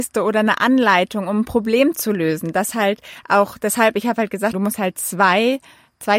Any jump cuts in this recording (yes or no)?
yes